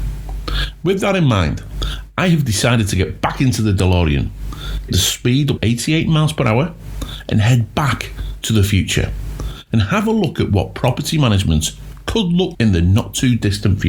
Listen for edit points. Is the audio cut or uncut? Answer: cut